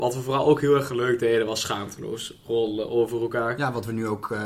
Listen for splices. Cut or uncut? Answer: uncut